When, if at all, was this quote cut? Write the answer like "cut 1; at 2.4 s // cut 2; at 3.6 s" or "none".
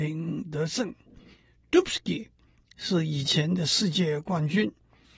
none